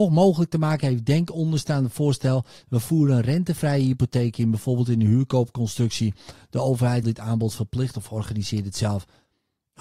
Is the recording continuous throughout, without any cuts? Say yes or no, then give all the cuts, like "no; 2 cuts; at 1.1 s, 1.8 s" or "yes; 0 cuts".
no; 1 cut; at 7.0 s